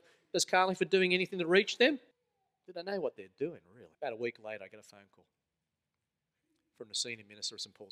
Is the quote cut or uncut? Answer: cut